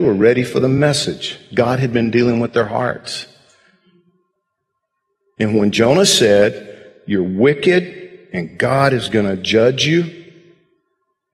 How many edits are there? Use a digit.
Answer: 0